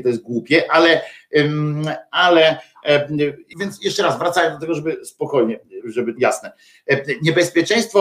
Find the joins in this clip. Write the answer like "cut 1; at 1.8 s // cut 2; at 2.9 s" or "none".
cut 1; at 3.5 s // cut 2; at 5.8 s // cut 3; at 6.2 s